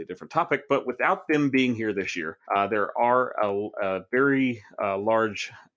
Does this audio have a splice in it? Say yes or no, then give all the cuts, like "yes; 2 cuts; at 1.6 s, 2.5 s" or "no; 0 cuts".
yes; 1 cut; at 2.4 s